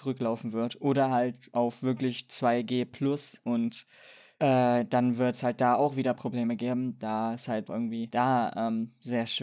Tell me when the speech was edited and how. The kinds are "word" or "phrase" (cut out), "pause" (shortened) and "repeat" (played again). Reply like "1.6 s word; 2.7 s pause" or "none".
none